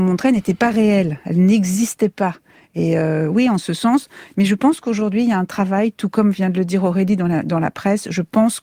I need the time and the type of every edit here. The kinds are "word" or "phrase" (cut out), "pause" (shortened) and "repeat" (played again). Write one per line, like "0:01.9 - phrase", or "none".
none

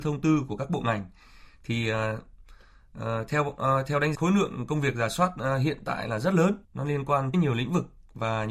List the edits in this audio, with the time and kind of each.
0:04.1 - phrase
0:06.6 - pause
0:07.3 - phrase

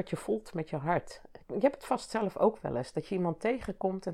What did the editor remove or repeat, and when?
0:01.4 - pause

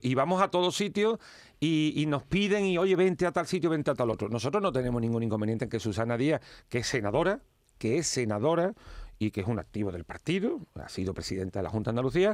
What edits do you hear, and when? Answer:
none

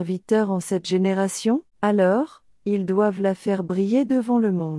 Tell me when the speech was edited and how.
0:01.7 - pause

